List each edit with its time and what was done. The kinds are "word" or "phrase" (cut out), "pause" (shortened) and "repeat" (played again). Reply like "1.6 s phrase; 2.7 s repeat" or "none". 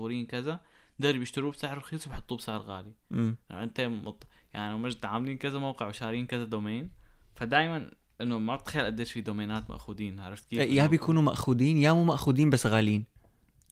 none